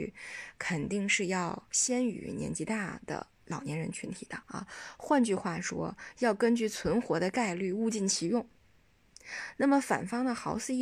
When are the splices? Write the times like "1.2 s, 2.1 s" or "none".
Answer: 4.4 s